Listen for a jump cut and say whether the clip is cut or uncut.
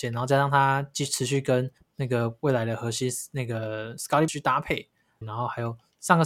cut